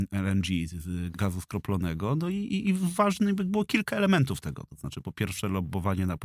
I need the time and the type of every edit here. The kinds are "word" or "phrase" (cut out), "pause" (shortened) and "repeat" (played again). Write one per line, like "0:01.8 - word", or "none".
0:01.1 - word